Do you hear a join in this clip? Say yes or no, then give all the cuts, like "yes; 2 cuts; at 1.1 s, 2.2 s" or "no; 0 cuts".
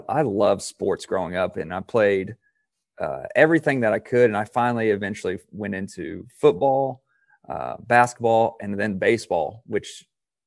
no; 0 cuts